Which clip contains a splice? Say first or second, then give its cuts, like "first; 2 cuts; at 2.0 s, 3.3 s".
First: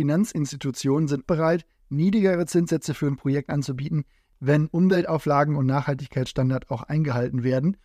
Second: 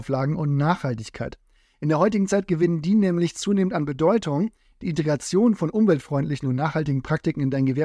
first; 1 cut; at 1.2 s